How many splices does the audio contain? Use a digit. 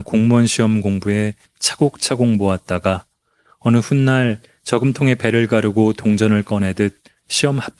0